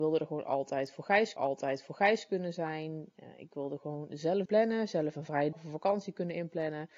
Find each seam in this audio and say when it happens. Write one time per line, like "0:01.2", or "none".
0:01.4
0:04.4
0:05.5